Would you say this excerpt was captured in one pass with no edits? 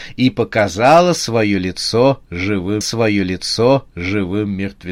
no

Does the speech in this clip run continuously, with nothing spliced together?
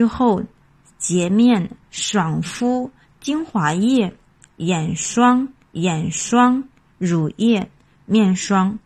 no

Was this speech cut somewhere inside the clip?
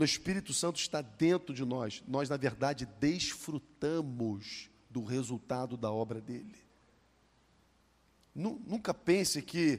no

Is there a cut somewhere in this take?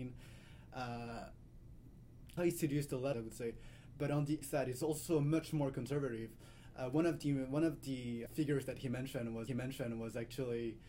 yes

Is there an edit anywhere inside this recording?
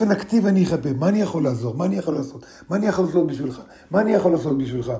no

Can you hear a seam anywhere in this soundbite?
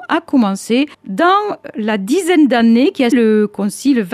yes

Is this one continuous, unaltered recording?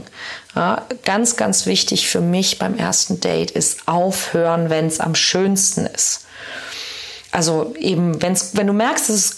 yes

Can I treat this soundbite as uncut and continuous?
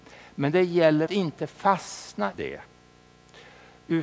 no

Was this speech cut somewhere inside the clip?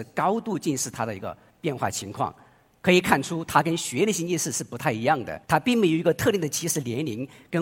yes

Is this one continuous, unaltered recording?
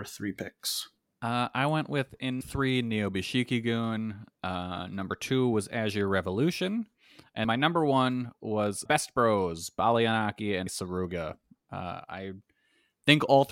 no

